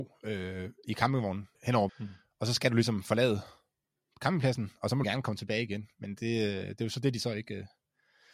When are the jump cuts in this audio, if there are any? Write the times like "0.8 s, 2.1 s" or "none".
1.5 s, 1.9 s, 5.0 s